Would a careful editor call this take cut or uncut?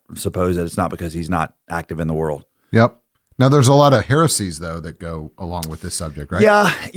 uncut